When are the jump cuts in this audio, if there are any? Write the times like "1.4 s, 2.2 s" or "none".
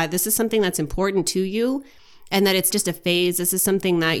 2.7 s